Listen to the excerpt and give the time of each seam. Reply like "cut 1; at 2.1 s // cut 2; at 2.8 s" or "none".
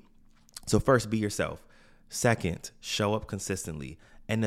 none